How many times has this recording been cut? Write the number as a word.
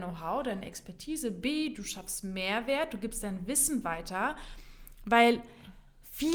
zero